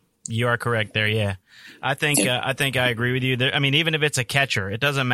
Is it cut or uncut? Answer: uncut